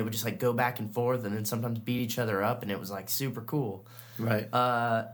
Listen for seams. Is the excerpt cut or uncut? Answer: uncut